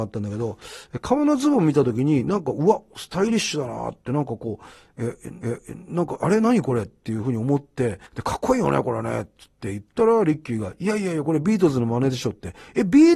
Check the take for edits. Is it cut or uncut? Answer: cut